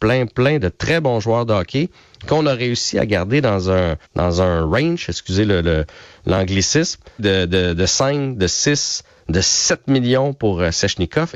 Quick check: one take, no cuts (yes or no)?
no